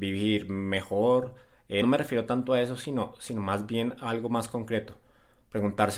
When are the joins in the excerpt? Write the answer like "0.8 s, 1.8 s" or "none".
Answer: 1.8 s